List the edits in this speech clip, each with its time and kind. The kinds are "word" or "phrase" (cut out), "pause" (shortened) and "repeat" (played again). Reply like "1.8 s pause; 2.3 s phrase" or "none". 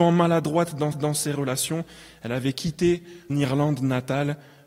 0.9 s repeat; 3.3 s word